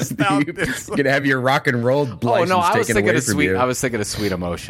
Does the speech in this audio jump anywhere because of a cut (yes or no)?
no